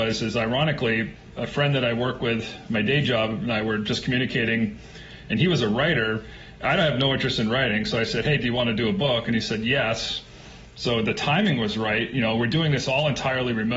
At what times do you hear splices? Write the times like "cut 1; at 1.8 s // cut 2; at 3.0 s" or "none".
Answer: none